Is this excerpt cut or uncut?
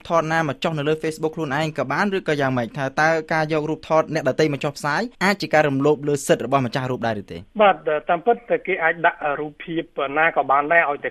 cut